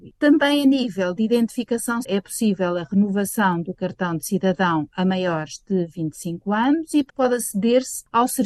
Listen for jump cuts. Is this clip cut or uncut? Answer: cut